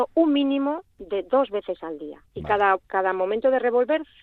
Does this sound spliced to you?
yes; 2 cuts; at 2.3 s, 2.8 s

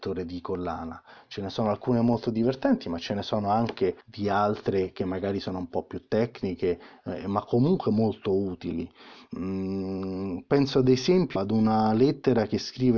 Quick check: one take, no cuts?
no; 2 cuts; at 4.0 s, 11.4 s

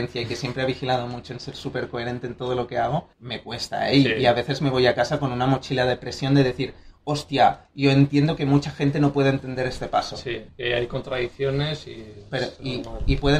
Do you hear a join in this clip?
yes; 1 cut; at 3.1 s

